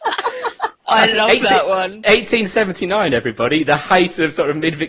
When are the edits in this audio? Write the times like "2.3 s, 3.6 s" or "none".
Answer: none